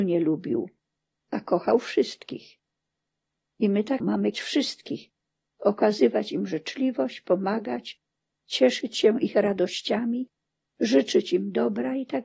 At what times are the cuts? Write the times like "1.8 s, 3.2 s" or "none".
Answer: 4.0 s, 4.3 s

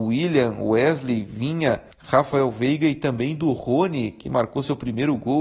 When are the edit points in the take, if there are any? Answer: 1.9 s

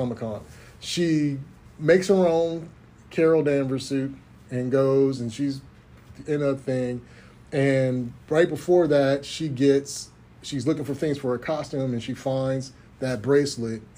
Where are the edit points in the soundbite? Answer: none

